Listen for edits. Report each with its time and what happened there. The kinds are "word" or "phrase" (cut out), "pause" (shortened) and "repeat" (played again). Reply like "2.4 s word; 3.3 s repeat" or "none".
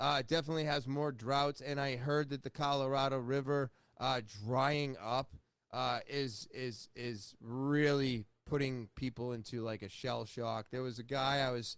none